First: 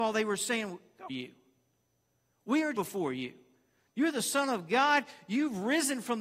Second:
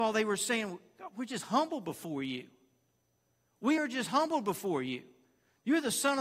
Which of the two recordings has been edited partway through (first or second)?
first